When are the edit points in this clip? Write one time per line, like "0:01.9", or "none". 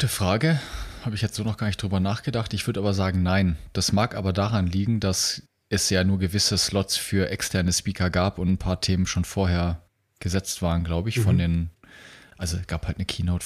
none

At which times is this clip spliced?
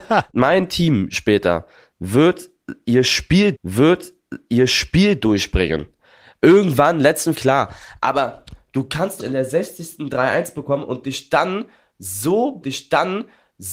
0:03.5
0:07.3
0:09.2
0:12.6

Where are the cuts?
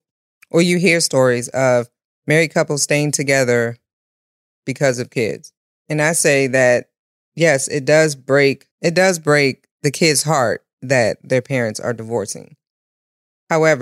0:08.7

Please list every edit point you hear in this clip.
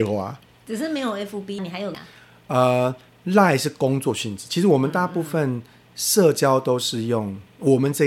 0:01.6
0:01.9

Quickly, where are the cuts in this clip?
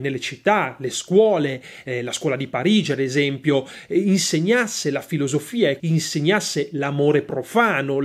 0:05.8

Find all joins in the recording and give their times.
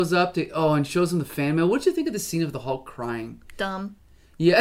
none

